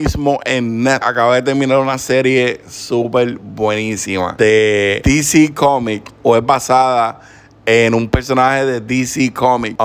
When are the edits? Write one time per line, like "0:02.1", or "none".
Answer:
0:01.0